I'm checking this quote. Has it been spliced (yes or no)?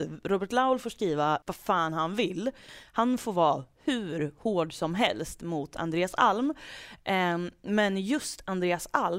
yes